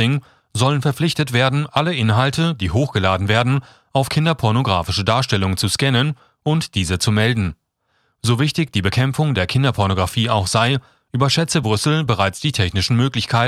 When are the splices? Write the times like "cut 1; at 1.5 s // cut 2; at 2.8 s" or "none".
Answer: none